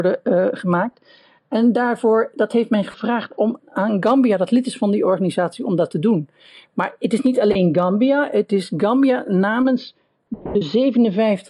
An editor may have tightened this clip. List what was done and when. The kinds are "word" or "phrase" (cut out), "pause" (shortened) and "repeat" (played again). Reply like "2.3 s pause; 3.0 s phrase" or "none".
3.6 s word

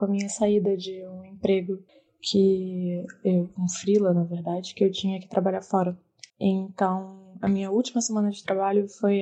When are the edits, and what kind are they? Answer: 1.9 s pause; 6.3 s pause

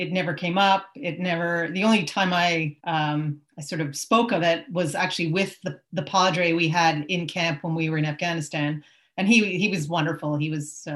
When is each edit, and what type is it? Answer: 2.8 s pause

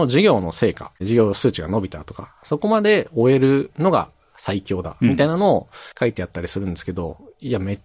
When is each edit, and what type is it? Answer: 1.0 s pause; 5.9 s pause

